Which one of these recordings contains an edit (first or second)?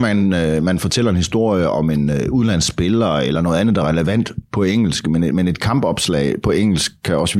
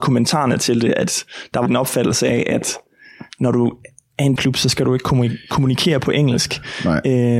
second